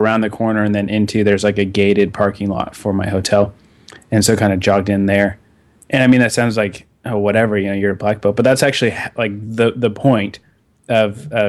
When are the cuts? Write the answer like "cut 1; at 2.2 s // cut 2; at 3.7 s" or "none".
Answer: none

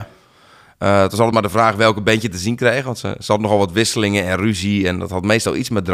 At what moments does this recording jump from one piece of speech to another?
none

